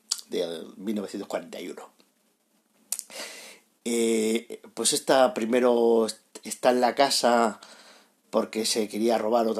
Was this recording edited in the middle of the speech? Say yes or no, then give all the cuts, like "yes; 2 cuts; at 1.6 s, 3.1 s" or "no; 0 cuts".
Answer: no; 0 cuts